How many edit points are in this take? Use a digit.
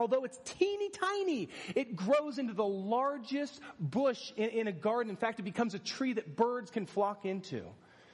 0